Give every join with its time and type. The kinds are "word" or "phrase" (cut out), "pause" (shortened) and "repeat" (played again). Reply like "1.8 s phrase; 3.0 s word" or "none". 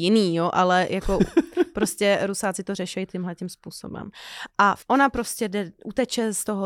4.8 s pause